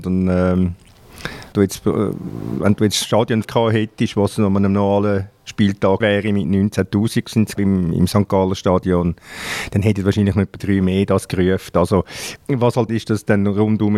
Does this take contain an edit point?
yes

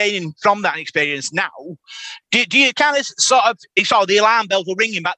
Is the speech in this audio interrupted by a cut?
yes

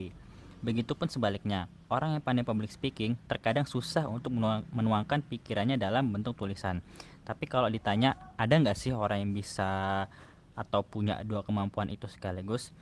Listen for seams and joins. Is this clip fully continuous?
yes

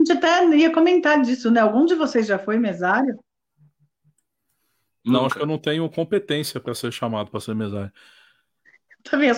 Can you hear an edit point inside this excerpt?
no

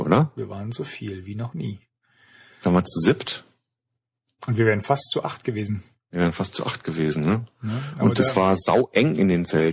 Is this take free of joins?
yes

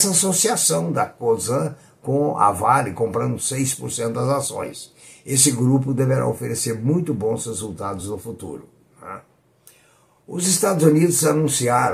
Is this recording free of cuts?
yes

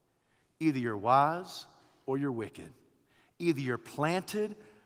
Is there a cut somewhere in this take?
no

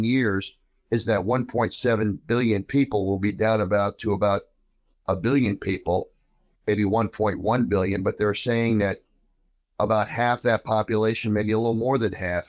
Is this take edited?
no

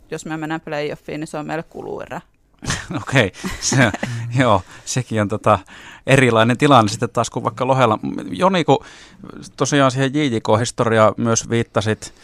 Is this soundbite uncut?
yes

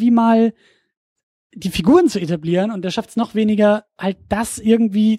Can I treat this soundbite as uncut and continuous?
yes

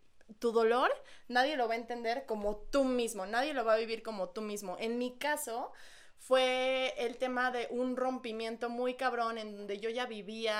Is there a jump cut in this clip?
no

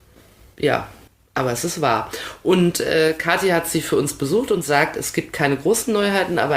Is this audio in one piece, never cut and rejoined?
no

